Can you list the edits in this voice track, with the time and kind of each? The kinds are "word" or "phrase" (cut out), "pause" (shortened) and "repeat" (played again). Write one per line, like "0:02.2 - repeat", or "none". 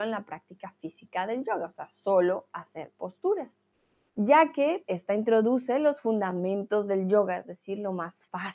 0:03.7 - pause
0:04.9 - word